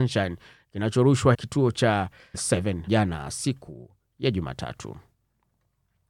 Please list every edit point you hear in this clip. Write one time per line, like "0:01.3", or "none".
0:01.3
0:02.3
0:02.9